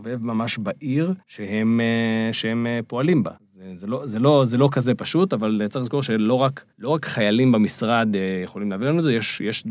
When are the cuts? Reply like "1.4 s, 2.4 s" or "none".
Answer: 1.2 s, 3.4 s, 6.7 s